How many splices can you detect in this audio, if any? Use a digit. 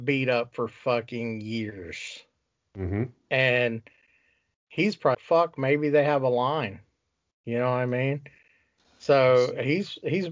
1